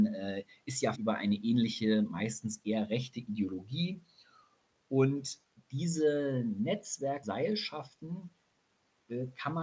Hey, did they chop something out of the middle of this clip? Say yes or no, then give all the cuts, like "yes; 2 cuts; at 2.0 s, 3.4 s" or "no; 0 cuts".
yes; 2 cuts; at 0.9 s, 7.2 s